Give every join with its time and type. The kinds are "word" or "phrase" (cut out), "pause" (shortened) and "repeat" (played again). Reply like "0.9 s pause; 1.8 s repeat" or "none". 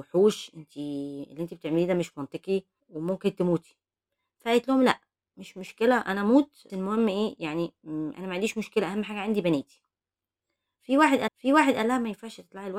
2.8 s pause; 6.7 s word; 11.3 s repeat